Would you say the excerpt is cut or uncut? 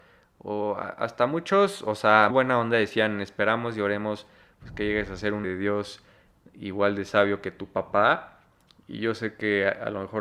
cut